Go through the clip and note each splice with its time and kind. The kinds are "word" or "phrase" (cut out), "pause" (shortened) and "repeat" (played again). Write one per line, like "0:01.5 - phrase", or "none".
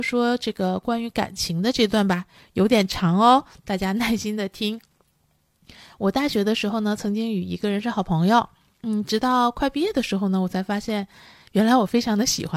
none

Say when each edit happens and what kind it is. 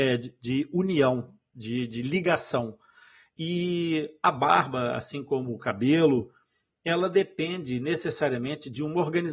none

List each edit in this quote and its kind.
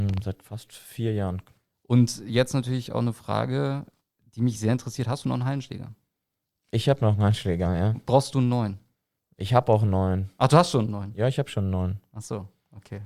none

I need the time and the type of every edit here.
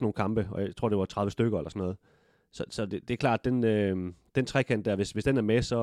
none

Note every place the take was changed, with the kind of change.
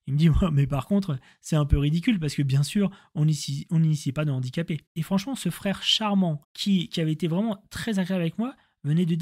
0:04.9 - pause
0:06.4 - pause

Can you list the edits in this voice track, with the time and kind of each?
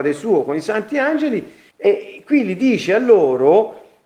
0:01.7 - pause

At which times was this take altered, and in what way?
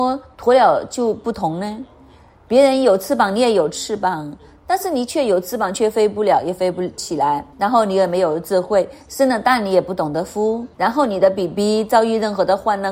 0:07.5 - pause
0:10.7 - pause

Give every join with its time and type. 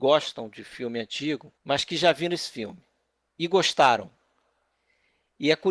0:01.6 - pause

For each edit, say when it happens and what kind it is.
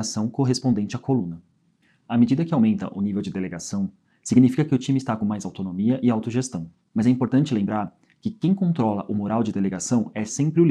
none

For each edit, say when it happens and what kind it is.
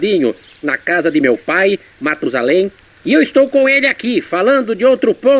none

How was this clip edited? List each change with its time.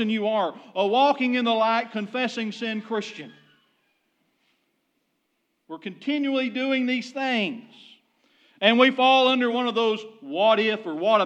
none

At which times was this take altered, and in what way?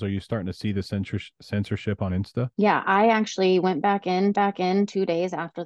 0:02.5 - pause
0:04.3 - repeat

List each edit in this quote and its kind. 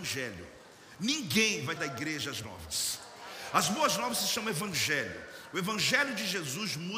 0:01.8 - word
0:02.4 - word

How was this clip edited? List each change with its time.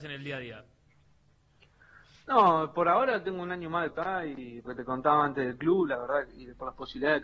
0:03.9 - word
0:04.7 - word

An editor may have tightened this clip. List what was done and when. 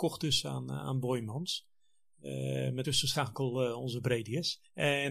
0:02.8 - word

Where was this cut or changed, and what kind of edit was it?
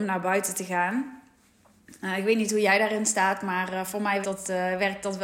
0:04.2 - word

